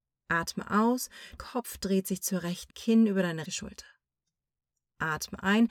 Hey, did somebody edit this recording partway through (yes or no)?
yes